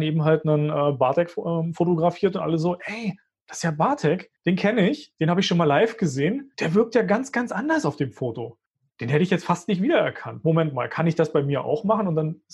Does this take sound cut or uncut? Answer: uncut